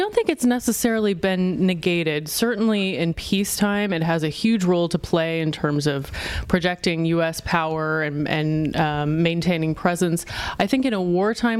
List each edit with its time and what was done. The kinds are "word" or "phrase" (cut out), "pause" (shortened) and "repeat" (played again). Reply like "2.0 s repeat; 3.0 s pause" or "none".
none